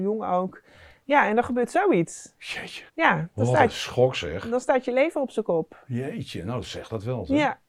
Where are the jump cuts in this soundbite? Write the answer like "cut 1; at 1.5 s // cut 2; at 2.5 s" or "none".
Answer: cut 1; at 2.9 s